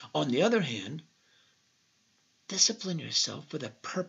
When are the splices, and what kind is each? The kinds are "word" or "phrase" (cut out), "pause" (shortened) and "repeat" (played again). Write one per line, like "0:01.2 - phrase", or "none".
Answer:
none